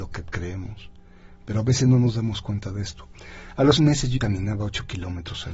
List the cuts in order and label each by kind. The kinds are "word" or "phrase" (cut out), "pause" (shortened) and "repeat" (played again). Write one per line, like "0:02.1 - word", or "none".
0:03.8 - word
0:04.2 - word